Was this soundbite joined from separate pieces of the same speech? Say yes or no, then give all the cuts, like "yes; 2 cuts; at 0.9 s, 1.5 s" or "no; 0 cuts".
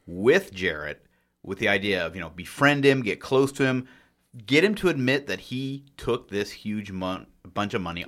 no; 0 cuts